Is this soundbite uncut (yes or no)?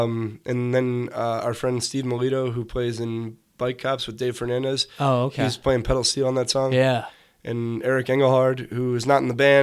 yes